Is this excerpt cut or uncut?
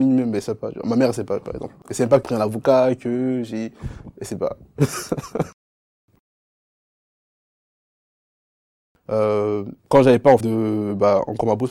cut